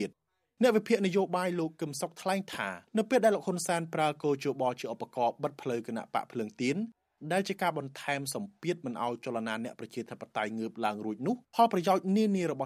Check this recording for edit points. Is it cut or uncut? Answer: cut